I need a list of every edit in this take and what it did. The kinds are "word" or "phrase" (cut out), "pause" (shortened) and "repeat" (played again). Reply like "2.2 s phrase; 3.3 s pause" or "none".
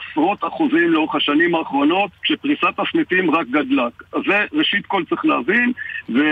2.2 s pause